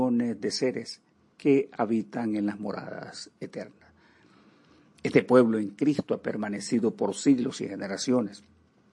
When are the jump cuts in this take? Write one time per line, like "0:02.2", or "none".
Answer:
none